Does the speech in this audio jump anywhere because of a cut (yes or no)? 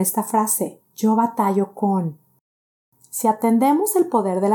no